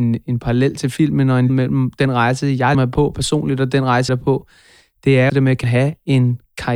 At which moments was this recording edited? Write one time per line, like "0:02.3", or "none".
0:01.5
0:02.7
0:04.1
0:05.3
0:05.6